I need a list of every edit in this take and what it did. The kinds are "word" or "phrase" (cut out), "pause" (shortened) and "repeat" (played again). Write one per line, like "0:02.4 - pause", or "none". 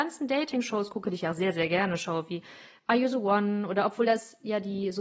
none